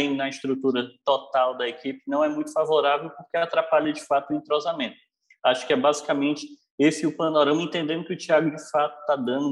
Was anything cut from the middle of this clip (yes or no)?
no